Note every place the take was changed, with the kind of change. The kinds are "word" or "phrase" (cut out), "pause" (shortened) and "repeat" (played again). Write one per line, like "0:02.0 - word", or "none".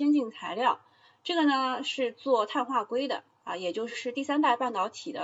none